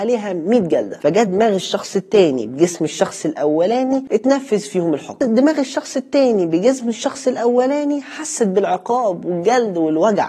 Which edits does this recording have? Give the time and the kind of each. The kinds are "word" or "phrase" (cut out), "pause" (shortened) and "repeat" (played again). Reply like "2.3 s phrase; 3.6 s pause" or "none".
none